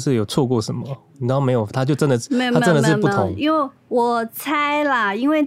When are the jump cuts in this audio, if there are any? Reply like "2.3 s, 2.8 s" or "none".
3.8 s